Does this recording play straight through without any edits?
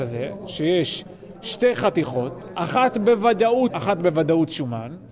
no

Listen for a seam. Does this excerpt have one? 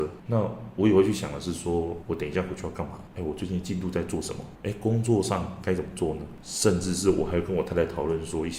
yes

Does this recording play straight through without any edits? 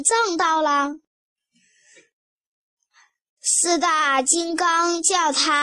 yes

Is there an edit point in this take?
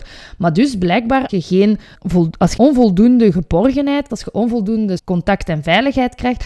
yes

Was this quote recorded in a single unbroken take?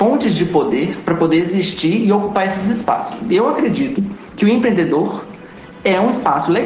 yes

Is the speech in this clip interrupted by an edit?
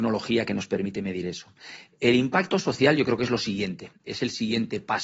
no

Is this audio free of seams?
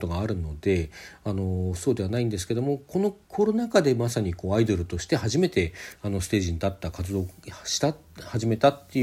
no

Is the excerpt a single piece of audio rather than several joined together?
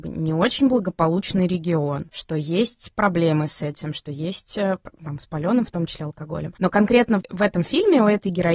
no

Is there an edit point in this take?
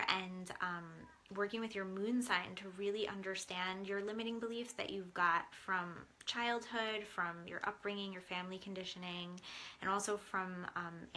no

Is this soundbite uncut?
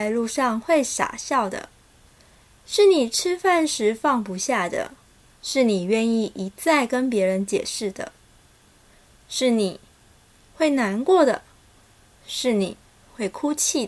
no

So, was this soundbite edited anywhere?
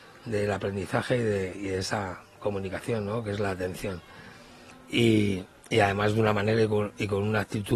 no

